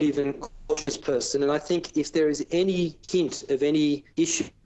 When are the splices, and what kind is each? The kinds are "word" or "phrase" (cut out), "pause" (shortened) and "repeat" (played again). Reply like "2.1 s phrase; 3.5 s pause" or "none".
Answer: 3.0 s pause